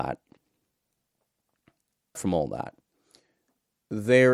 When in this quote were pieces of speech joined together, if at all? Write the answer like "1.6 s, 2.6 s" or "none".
2.1 s